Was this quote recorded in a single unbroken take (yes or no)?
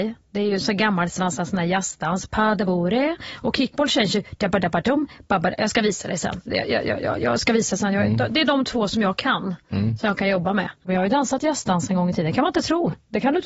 no